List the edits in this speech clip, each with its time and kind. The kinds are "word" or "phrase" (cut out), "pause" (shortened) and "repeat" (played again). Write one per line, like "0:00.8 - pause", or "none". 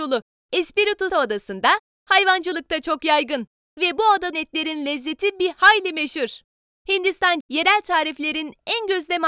0:01.1 - word
0:04.3 - word
0:07.4 - word